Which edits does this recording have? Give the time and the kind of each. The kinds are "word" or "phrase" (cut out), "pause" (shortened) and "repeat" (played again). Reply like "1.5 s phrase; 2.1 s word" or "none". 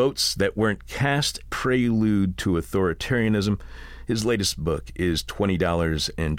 1.5 s word